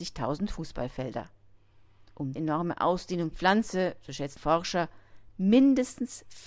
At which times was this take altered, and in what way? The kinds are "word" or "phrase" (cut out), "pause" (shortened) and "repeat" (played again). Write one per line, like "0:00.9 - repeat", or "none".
0:02.4 - word
0:03.3 - phrase
0:04.4 - word